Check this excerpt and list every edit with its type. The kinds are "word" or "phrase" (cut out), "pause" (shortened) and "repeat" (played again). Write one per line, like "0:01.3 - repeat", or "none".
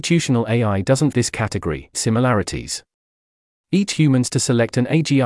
0:01.1 - word
0:01.9 - word
0:03.9 - word